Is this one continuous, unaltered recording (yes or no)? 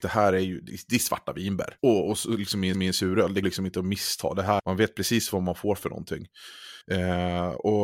no